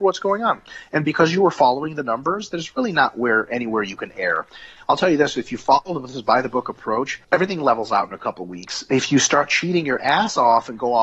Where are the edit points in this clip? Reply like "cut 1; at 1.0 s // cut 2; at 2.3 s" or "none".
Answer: cut 1; at 7.2 s